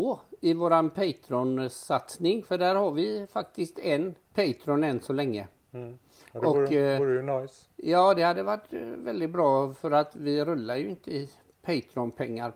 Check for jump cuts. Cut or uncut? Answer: cut